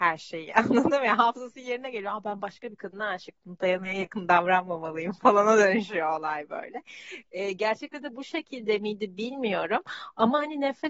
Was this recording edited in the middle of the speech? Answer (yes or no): no